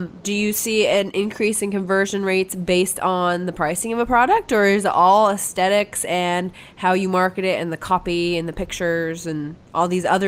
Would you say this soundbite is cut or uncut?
uncut